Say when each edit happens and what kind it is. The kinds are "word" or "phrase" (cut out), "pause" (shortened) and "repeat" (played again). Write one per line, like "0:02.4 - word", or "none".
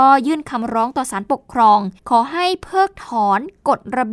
0:02.0 - pause